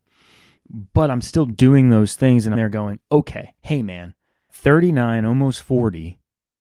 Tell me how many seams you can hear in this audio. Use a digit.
3